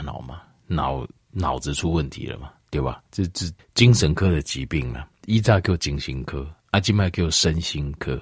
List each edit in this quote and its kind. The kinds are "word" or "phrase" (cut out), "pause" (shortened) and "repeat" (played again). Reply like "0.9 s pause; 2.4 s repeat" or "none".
3.1 s pause; 3.6 s pause